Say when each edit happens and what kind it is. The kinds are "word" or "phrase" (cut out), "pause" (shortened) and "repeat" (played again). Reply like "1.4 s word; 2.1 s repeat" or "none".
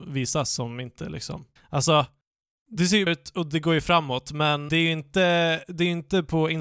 1.6 s pause; 3.1 s word; 4.7 s word

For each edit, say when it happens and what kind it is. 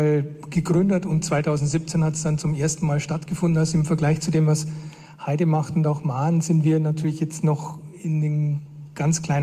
none

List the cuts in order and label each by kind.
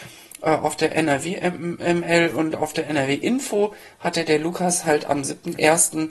none

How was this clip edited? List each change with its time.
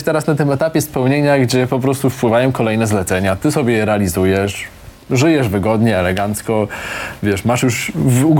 none

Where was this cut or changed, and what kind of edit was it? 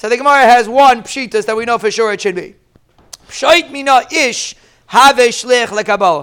none

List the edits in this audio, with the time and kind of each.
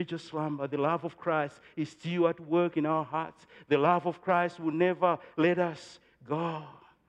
none

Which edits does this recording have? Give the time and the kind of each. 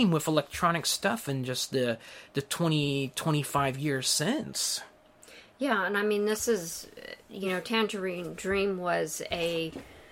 none

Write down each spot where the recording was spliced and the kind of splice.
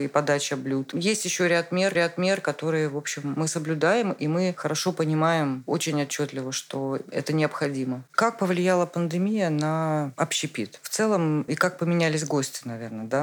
1.9 s repeat; 11.5 s word

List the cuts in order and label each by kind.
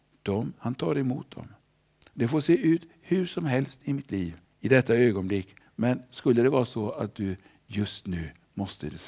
4.4 s pause; 5.6 s pause

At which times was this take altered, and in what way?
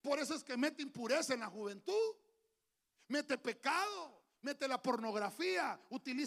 none

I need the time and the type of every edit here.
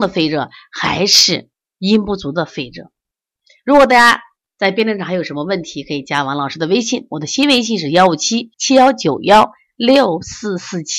8.5 s pause

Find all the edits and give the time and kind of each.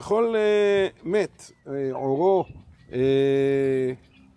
none

